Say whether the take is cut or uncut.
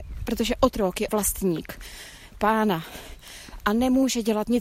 cut